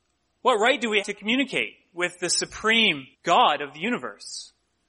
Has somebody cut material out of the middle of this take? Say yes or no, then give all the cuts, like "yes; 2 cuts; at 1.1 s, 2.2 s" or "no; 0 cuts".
yes; 2 cuts; at 1.0 s, 3.1 s